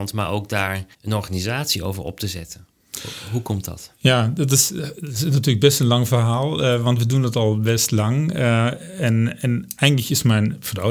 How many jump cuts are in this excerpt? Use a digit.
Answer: 1